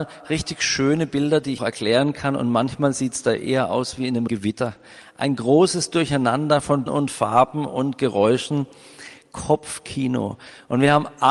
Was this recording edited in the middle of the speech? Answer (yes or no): yes